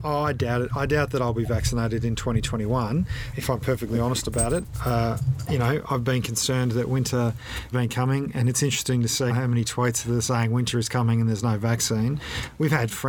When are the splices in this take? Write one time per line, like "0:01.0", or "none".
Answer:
0:03.3
0:07.7
0:09.3